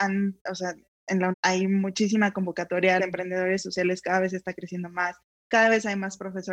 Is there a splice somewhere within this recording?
yes; 2 cuts; at 1.3 s, 3.0 s

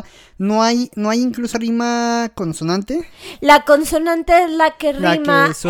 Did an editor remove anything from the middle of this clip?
yes; 1 cut; at 1.5 s

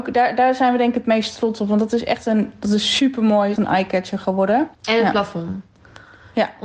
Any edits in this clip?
yes; 2 cuts; at 3.6 s, 4.7 s

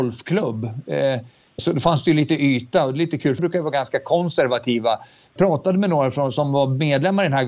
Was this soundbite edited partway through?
yes; 3 cuts; at 1.6 s, 3.4 s, 5.4 s

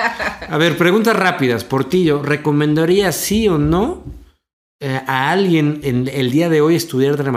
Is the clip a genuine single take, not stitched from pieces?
yes; 0 cuts

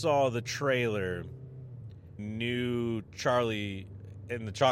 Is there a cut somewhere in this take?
yes; 1 cut; at 2.2 s

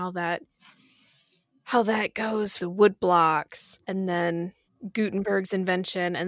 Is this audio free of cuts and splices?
no; 2 cuts; at 2.6 s, 3.8 s

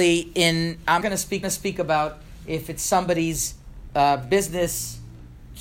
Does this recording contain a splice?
yes; 2 cuts; at 1.0 s, 1.4 s

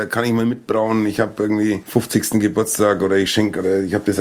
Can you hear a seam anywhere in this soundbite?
no; 0 cuts

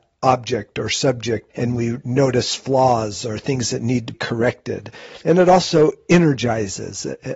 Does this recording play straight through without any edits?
no; 3 cuts; at 1.5 s, 4.1 s, 5.2 s

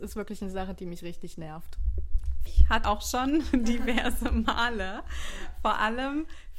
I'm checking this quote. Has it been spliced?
yes; 2 cuts; at 2.5 s, 2.8 s

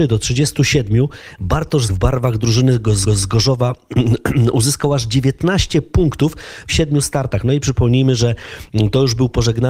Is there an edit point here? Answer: yes; 3 cuts; at 1.9 s, 3.1 s, 6.7 s

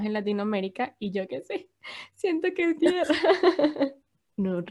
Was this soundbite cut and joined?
yes; 1 cut; at 2.8 s

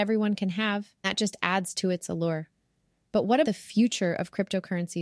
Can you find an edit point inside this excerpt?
yes; 2 cuts; at 1.0 s, 3.4 s

